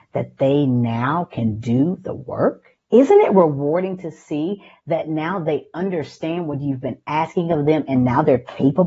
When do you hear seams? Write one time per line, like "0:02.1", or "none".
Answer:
0:02.8